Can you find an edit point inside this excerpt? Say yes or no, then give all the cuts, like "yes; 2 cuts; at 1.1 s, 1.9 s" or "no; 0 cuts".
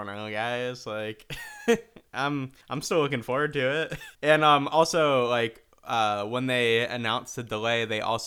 yes; 2 cuts; at 2.6 s, 4.1 s